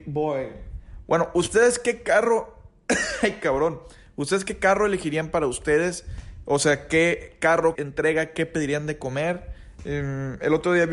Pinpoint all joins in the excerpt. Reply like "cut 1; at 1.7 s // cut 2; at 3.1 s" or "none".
cut 1; at 7.8 s